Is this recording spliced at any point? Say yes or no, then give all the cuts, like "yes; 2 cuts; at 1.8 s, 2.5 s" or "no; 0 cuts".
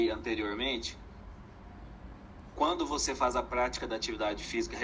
no; 0 cuts